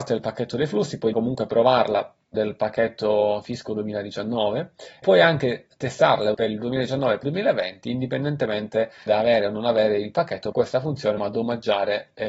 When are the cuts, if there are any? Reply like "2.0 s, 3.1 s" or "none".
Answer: 1.1 s, 2.3 s, 5.0 s, 6.3 s, 7.2 s, 9.1 s, 10.5 s, 11.2 s

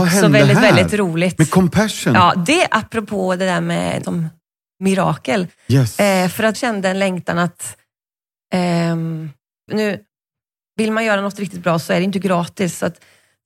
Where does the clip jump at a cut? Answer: 4.0 s, 6.5 s, 9.7 s

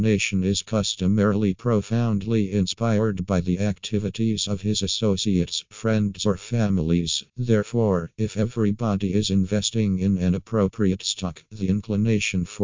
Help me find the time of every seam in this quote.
7.3 s

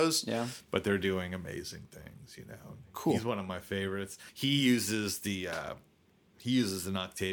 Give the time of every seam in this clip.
4.3 s

